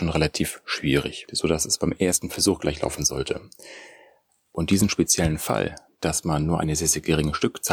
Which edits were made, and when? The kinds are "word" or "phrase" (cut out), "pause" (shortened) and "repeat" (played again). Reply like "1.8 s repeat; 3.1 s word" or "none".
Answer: none